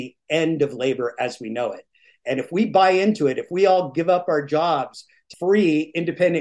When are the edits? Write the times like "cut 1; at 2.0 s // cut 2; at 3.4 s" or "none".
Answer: cut 1; at 5.3 s